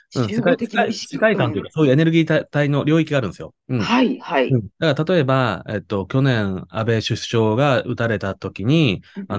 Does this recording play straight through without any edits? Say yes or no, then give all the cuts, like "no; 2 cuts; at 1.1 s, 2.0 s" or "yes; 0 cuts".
no; 1 cut; at 4.7 s